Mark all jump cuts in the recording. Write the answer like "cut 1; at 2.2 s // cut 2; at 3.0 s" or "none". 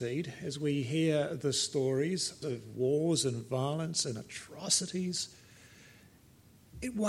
cut 1; at 2.4 s